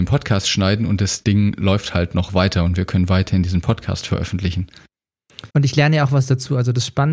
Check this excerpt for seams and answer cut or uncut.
cut